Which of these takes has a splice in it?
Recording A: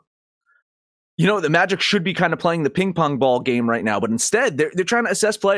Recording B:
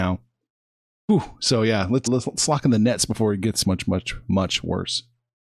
B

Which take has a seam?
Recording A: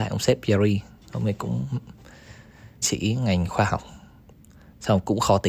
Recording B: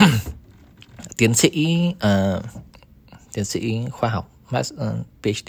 A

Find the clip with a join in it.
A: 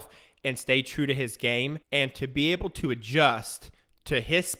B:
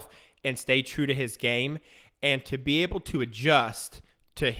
A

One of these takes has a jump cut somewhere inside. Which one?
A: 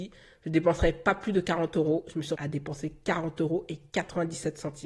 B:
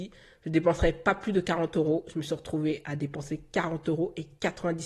A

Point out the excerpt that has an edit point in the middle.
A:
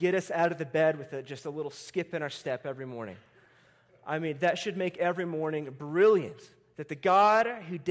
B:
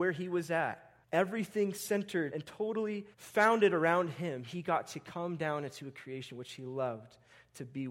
B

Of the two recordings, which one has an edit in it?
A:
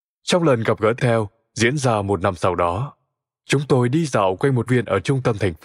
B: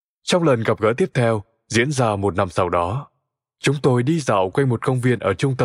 A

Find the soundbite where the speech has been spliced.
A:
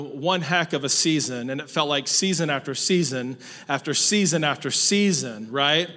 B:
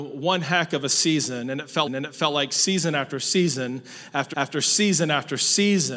B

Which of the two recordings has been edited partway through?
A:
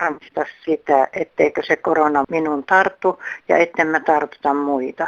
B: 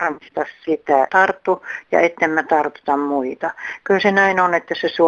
B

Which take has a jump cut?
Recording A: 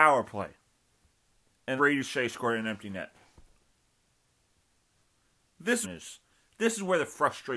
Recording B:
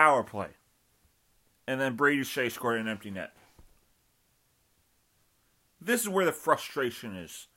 A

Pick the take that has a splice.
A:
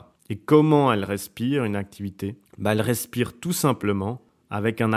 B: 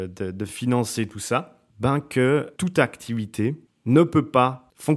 B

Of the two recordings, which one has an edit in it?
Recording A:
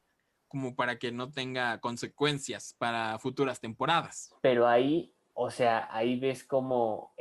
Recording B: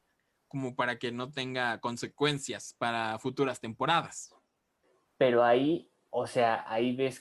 A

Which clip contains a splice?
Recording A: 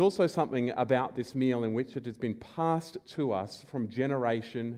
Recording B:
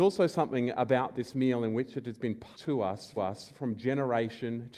B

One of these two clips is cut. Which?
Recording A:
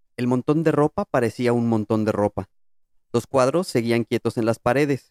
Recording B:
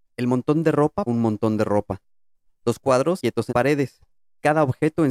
B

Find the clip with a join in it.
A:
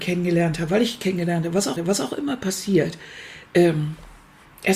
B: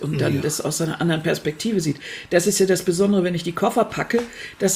A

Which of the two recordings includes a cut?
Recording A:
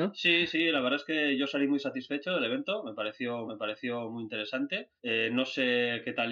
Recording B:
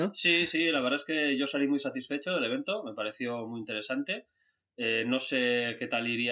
A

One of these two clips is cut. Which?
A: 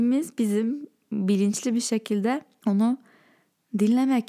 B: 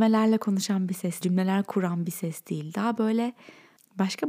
B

